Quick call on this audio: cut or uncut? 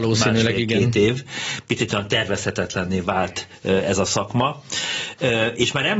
uncut